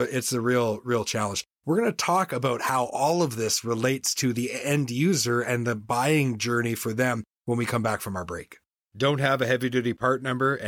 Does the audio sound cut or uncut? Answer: cut